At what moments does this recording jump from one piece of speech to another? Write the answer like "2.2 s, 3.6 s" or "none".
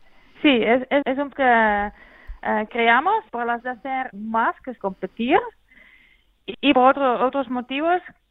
1.0 s, 1.3 s, 2.7 s, 3.3 s, 3.6 s, 4.1 s, 4.8 s, 6.7 s